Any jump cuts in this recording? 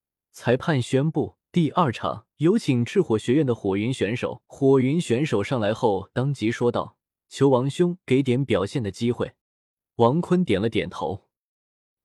yes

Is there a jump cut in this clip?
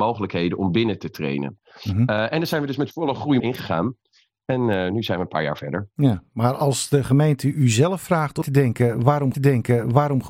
yes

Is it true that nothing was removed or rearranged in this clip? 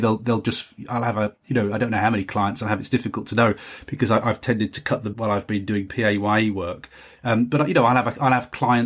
no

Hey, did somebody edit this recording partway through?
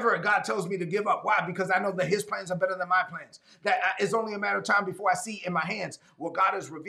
no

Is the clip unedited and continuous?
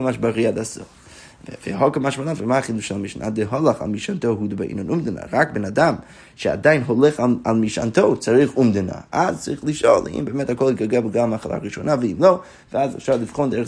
yes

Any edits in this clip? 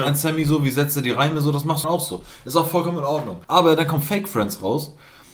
yes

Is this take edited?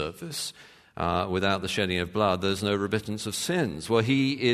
no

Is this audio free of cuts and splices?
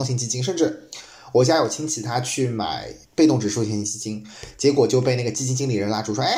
no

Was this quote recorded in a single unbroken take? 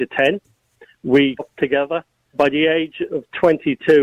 no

